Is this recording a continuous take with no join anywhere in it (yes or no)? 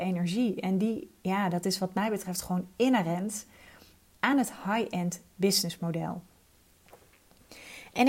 yes